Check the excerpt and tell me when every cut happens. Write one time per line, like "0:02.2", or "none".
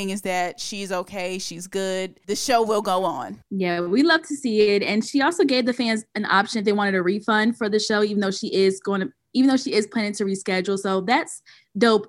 none